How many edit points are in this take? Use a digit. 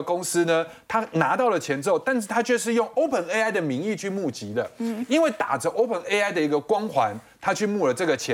0